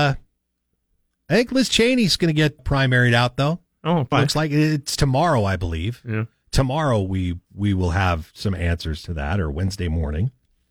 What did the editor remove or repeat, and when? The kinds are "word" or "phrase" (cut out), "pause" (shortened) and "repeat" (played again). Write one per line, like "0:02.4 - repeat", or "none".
0:02.6 - word
0:04.1 - phrase
0:07.4 - pause